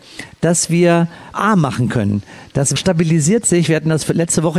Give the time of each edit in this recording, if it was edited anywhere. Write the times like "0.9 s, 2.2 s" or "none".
1.3 s, 2.8 s